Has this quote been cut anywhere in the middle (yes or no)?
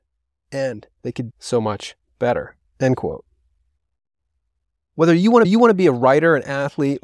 yes